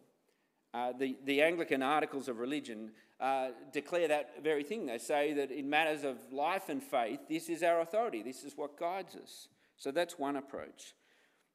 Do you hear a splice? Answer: no; 0 cuts

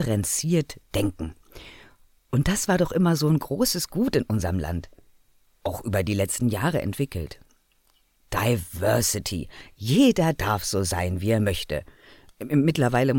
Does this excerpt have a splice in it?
no; 0 cuts

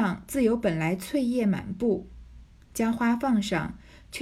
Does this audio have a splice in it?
no; 0 cuts

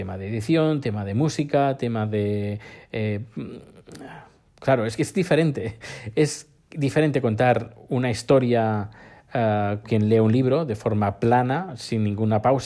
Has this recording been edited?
yes; 2 cuts; at 5.0 s, 9.8 s

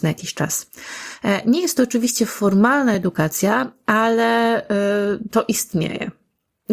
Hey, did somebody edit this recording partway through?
no; 0 cuts

